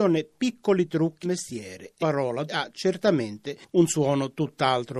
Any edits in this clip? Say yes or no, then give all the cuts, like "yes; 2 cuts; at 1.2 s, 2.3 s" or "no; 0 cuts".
yes; 3 cuts; at 1.2 s, 2.0 s, 2.5 s